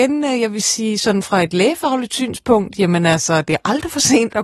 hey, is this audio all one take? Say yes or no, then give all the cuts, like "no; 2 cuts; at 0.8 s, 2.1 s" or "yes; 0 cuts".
yes; 0 cuts